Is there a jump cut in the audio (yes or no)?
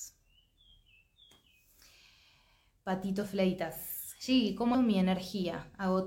yes